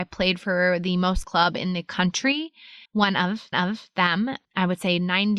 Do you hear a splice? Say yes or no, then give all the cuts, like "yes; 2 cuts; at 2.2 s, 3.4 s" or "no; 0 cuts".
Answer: yes; 3 cuts; at 1.2 s, 2.8 s, 3.5 s